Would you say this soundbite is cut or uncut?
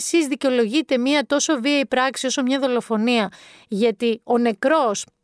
uncut